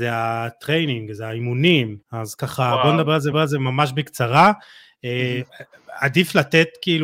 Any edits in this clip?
yes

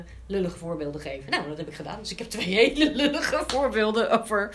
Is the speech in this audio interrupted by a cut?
no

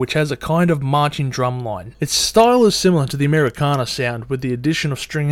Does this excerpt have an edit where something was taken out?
no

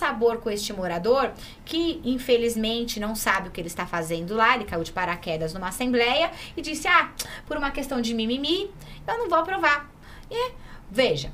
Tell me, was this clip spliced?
no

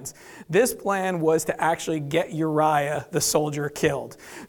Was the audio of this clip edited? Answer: no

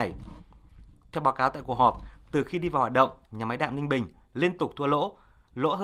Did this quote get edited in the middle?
no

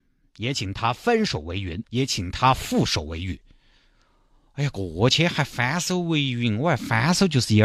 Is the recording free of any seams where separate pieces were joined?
no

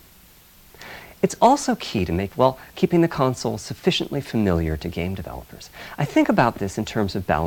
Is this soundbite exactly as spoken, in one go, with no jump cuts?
no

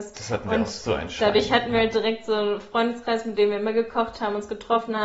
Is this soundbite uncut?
yes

